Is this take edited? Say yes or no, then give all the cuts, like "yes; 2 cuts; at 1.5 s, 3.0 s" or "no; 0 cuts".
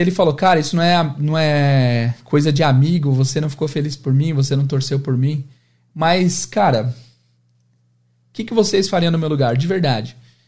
no; 0 cuts